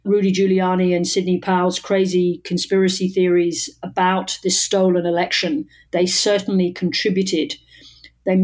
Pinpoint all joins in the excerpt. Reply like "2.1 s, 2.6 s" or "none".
none